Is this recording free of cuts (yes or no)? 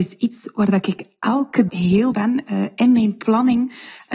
no